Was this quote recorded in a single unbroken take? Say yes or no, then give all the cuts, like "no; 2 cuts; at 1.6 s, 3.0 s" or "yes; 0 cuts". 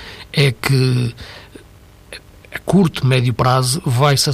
yes; 0 cuts